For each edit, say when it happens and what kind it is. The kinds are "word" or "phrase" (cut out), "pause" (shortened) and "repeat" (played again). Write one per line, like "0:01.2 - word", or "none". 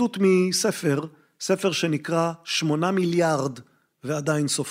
none